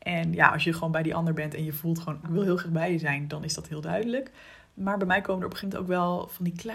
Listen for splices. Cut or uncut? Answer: cut